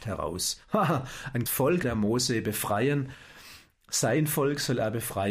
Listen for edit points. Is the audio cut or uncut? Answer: cut